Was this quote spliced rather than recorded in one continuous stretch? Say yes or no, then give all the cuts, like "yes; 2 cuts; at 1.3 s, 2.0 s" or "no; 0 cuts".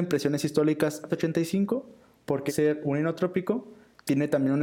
yes; 2 cuts; at 1.1 s, 2.5 s